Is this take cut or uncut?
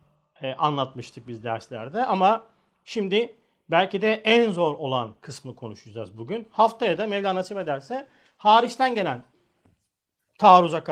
uncut